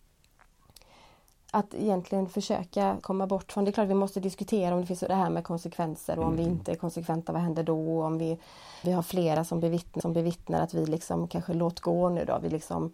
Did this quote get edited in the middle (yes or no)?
yes